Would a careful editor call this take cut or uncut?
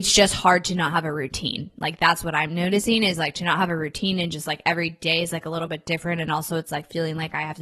uncut